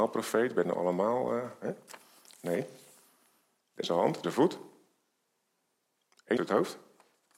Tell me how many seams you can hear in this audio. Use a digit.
3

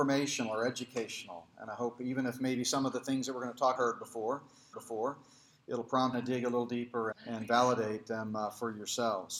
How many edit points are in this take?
4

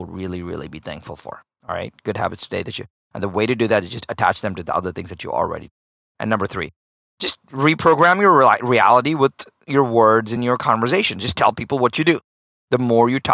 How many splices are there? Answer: 0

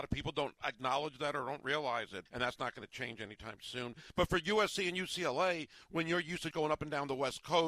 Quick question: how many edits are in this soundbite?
2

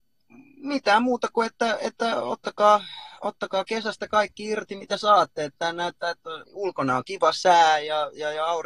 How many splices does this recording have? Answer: 1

